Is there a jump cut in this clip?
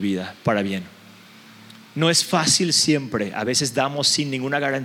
no; 0 cuts

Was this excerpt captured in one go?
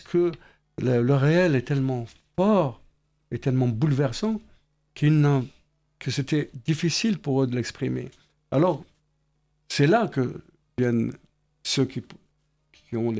yes; 0 cuts

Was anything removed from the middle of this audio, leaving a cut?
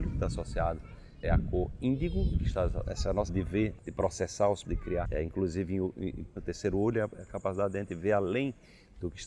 yes; 8 cuts; at 1.2 s, 2.3 s, 2.8 s, 3.3 s, 3.8 s, 4.6 s, 5.0 s, 6.4 s

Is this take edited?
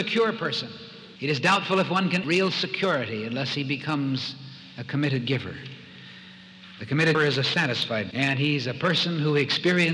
yes; 4 cuts; at 1.2 s, 2.2 s, 7.1 s, 8.1 s

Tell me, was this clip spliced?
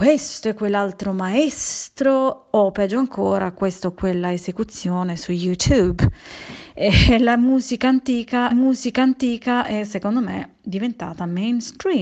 yes; 1 cut; at 8.5 s

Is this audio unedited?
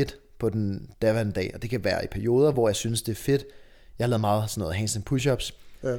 yes; 0 cuts

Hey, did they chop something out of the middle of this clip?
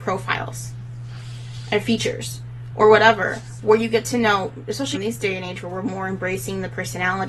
yes; 1 cut; at 4.9 s

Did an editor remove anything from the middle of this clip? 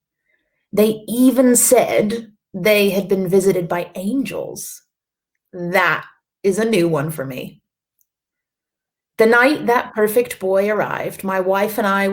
no; 0 cuts

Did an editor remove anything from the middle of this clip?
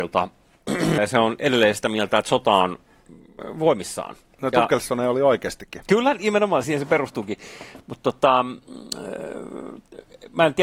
yes; 2 cuts; at 1.0 s, 6.6 s

